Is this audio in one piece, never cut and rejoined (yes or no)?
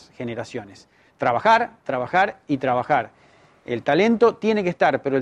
yes